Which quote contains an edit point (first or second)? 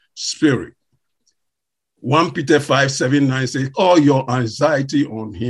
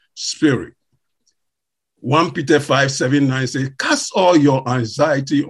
first